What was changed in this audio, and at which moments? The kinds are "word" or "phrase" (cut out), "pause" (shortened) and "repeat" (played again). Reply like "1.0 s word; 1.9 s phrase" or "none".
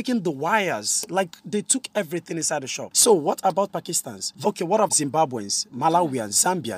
4.4 s phrase; 4.9 s word